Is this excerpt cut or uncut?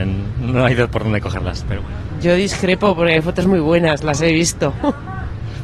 uncut